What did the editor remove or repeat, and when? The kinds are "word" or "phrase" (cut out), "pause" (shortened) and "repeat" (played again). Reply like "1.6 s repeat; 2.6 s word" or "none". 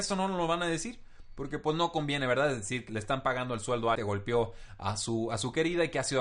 2.9 s word; 4.0 s phrase

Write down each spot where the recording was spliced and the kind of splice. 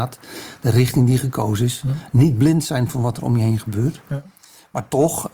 none

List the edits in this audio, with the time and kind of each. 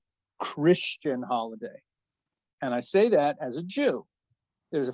none

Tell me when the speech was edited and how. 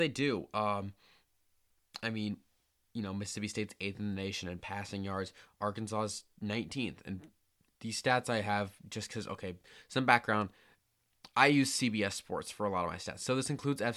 none

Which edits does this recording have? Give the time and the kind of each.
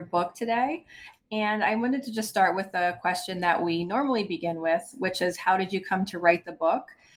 none

